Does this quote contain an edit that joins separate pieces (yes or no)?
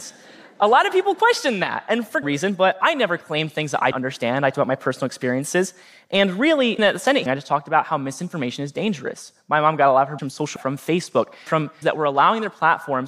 yes